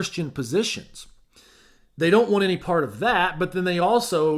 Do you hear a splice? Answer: no; 0 cuts

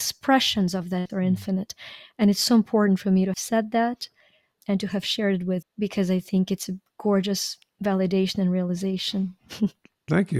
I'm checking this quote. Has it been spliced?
yes; 4 cuts; at 1.1 s, 3.3 s, 4.6 s, 5.6 s

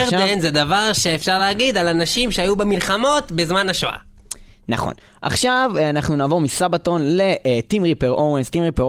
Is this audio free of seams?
yes; 0 cuts

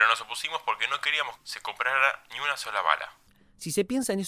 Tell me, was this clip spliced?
yes; 1 cut; at 1.4 s

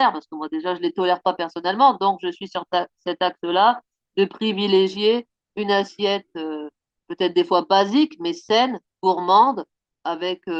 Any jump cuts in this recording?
no; 0 cuts

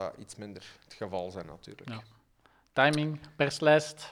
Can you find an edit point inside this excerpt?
no; 0 cuts

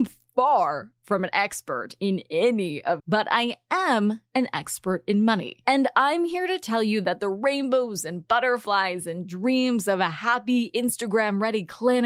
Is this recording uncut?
no; 1 cut; at 3.0 s

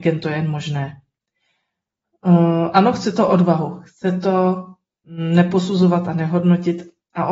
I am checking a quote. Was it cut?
no; 0 cuts

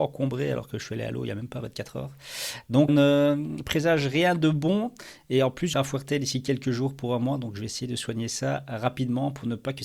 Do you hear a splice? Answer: yes; 2 cuts; at 2.9 s, 5.7 s

